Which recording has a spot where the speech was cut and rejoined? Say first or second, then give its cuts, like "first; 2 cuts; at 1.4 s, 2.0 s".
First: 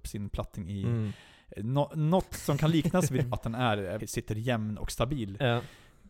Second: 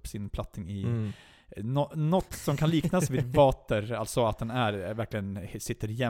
first; 2 cuts; at 3.3 s, 4.0 s